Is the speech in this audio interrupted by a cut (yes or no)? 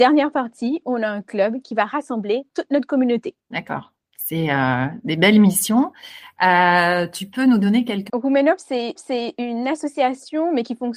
yes